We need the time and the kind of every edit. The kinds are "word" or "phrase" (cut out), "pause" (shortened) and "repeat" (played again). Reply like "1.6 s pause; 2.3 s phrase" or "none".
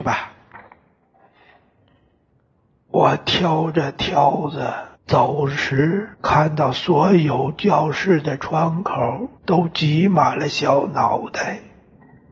5.0 s pause; 6.1 s pause; 9.4 s pause